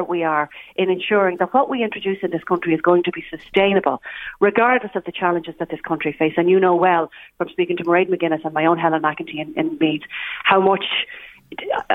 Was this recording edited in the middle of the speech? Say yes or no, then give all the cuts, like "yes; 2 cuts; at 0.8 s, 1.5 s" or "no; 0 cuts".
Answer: no; 0 cuts